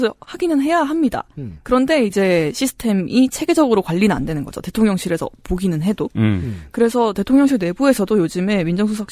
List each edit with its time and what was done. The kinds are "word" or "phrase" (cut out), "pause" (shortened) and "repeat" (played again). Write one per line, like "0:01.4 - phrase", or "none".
none